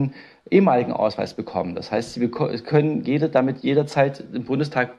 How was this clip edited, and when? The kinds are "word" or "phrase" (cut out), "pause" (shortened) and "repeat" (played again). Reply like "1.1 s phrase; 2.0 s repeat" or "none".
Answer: none